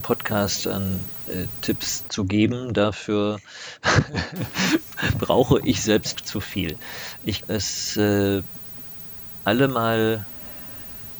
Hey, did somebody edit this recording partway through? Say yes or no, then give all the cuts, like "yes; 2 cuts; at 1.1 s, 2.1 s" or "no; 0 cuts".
yes; 3 cuts; at 6.1 s, 7.4 s, 9.4 s